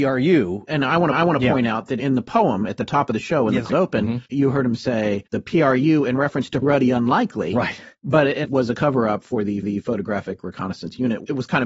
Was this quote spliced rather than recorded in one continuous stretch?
yes; 7 cuts; at 1.1 s, 3.7 s, 4.3 s, 5.3 s, 6.6 s, 8.4 s, 9.6 s

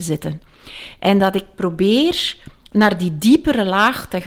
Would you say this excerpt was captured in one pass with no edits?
yes; 0 cuts

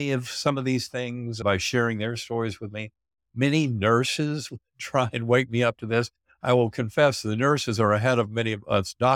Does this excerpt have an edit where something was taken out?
no; 0 cuts

